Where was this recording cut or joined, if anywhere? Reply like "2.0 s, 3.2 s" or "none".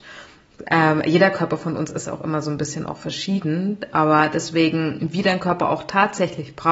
none